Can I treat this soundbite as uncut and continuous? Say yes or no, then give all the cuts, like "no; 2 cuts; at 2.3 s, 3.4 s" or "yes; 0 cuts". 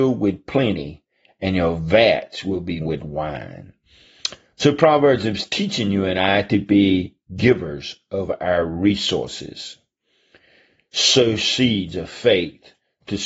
no; 1 cut; at 2.8 s